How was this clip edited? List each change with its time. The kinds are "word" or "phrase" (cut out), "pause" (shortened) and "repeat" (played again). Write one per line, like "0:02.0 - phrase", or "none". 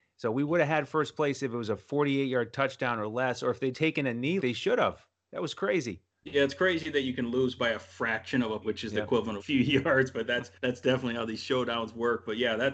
0:03.7 - word
0:04.4 - word
0:06.1 - pause
0:08.6 - word
0:09.4 - phrase
0:10.6 - pause